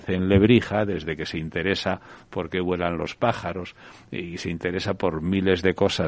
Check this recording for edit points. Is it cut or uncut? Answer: uncut